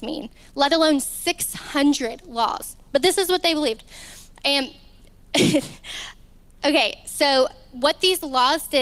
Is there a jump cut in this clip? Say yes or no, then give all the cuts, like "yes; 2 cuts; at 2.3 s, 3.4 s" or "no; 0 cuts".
no; 0 cuts